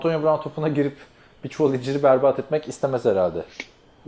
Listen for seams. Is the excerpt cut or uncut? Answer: uncut